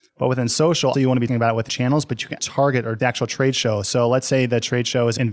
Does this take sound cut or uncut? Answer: cut